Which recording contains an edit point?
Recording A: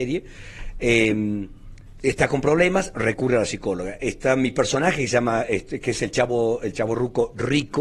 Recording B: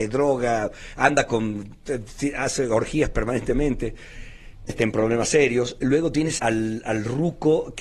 B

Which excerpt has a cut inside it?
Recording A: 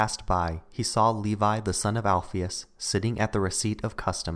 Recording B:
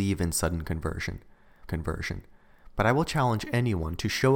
B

